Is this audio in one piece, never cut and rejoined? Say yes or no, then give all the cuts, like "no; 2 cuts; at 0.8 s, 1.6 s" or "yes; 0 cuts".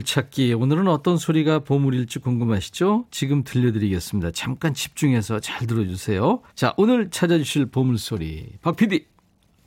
no; 1 cut; at 6.5 s